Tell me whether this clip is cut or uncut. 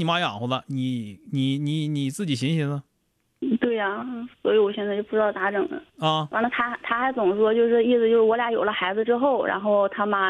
cut